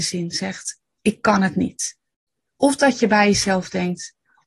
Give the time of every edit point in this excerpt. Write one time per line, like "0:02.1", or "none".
none